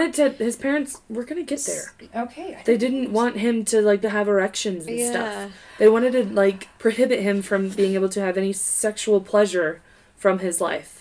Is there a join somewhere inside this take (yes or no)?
yes